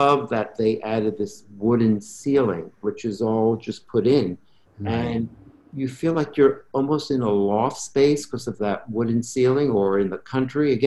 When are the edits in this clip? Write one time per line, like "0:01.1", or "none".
none